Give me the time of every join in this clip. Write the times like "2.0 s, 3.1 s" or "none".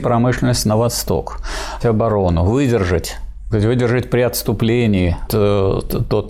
1.8 s, 3.5 s, 5.3 s